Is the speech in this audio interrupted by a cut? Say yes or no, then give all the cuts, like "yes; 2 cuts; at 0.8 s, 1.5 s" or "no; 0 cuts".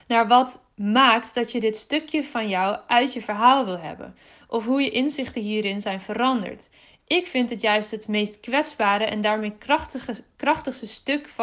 no; 0 cuts